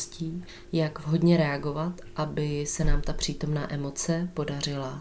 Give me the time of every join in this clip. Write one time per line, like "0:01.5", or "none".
none